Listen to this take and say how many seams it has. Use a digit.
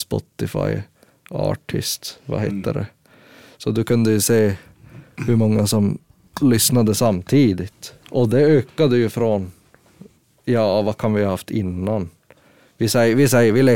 1